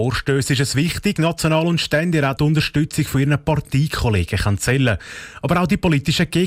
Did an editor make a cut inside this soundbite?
yes; 2 cuts; at 1.2 s, 2.4 s

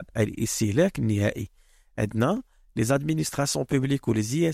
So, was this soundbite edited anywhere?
no; 0 cuts

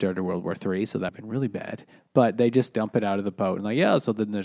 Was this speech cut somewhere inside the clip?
yes; 2 cuts; at 1.1 s, 2.7 s

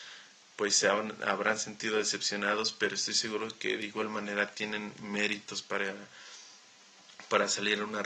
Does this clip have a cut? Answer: no; 0 cuts

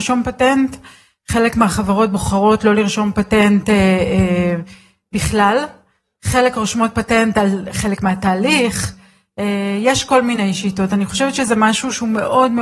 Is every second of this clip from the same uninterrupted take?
yes; 0 cuts

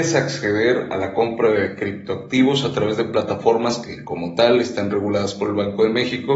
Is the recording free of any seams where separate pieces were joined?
yes; 0 cuts

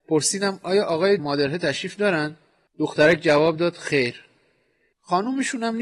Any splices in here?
yes; 1 cut; at 1.2 s

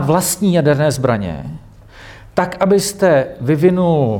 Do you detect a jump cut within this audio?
no; 0 cuts

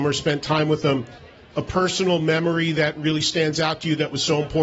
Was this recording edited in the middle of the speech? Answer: no; 0 cuts

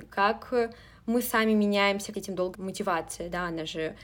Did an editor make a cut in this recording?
yes; 2 cuts; at 2.1 s, 2.5 s

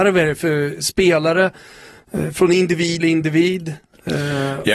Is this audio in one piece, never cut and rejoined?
no; 1 cut; at 3.0 s

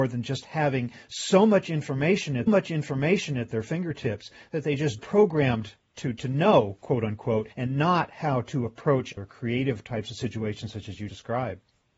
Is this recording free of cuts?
no; 5 cuts; at 2.5 s, 5.0 s, 7.5 s, 9.2 s, 11.1 s

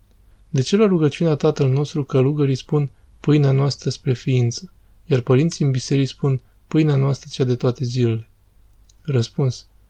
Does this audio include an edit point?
no; 0 cuts

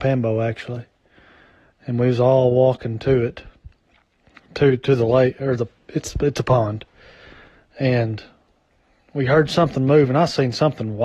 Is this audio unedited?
yes; 0 cuts

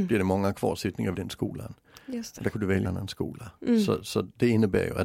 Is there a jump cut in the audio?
yes; 3 cuts; at 1.1 s, 2.5 s, 2.8 s

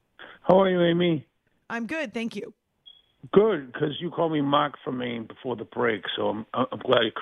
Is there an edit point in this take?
no; 0 cuts

